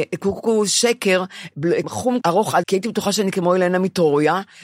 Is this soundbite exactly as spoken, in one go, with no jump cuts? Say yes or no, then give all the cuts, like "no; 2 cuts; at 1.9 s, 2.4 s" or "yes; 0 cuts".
no; 3 cuts; at 1.8 s, 2.2 s, 2.6 s